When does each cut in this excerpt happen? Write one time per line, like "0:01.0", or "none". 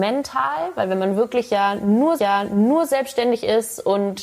0:02.2